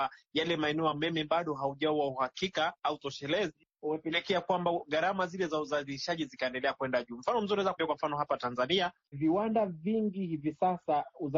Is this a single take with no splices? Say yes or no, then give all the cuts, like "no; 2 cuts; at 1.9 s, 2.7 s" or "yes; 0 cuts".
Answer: no; 3 cuts; at 0.9 s, 7.8 s, 9.1 s